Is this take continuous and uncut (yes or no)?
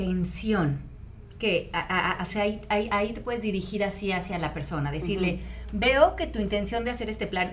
yes